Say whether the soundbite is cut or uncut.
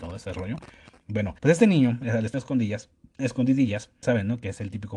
cut